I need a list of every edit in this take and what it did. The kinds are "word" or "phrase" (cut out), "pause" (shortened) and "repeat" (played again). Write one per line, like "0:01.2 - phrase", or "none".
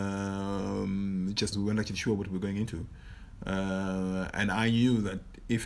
0:01.5 - phrase